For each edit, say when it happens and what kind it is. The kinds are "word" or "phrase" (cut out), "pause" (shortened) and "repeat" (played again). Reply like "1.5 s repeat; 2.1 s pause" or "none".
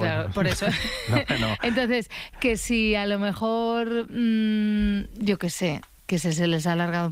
none